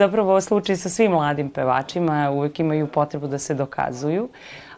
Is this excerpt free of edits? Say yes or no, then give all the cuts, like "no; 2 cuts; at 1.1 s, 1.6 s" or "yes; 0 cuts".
yes; 0 cuts